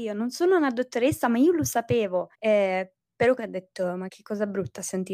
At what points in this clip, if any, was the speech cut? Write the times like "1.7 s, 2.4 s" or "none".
2.3 s, 3.4 s, 4.1 s